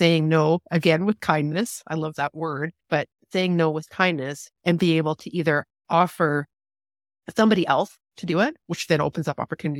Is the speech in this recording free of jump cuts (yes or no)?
no